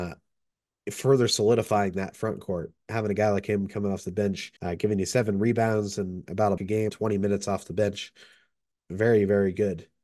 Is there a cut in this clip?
yes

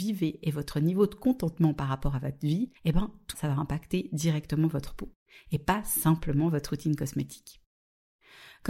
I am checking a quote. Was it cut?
yes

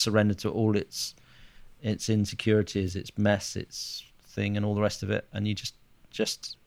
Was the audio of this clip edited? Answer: no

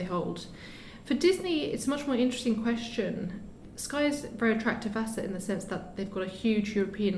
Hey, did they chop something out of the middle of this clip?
no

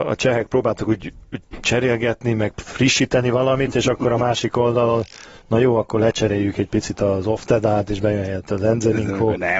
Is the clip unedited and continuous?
yes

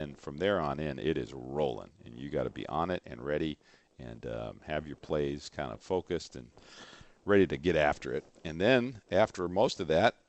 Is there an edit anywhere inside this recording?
no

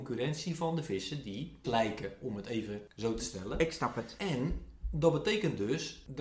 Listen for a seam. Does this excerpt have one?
yes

